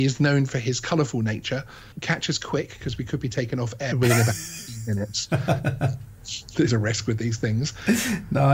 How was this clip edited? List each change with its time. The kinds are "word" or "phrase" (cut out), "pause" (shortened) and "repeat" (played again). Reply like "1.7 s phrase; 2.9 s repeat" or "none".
1.9 s word; 3.9 s word; 6.7 s word